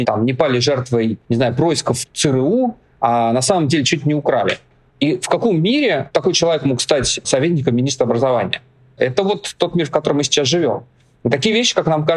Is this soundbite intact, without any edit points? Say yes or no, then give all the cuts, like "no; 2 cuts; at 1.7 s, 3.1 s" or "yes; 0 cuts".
yes; 0 cuts